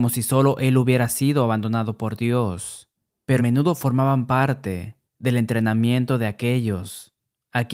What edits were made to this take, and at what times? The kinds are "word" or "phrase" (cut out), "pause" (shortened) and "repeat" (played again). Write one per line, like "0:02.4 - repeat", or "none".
0:03.4 - phrase
0:05.1 - pause